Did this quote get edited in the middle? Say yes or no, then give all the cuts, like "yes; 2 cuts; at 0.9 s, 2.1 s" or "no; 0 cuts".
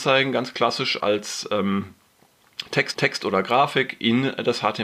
yes; 2 cuts; at 1.0 s, 2.9 s